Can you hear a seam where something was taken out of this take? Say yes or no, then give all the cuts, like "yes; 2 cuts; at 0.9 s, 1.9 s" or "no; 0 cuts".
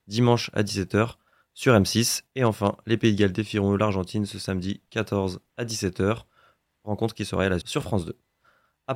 yes; 1 cut; at 7.6 s